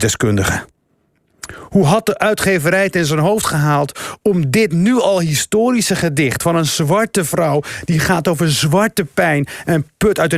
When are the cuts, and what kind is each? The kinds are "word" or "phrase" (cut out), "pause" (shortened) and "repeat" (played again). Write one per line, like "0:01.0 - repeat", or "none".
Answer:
none